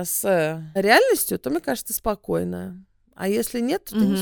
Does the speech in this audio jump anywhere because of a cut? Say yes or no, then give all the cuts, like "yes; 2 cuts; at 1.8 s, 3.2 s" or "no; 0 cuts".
no; 0 cuts